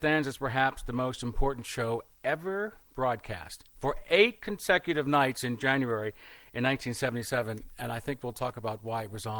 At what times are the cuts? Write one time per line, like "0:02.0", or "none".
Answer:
0:03.7

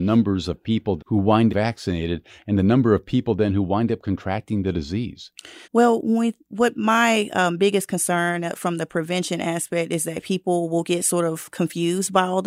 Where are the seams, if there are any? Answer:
0:01.0
0:01.5
0:05.6

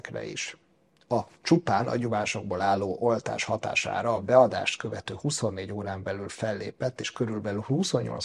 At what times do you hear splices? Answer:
none

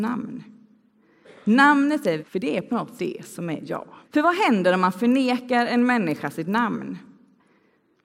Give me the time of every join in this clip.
0:02.2
0:03.0
0:04.0

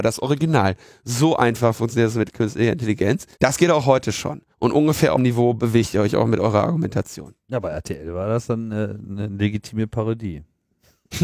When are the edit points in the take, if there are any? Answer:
0:03.3
0:04.5
0:05.2

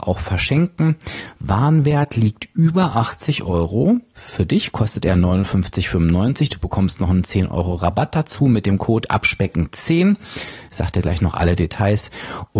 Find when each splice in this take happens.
none

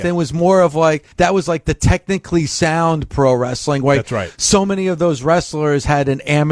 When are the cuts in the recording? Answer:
0:01.1

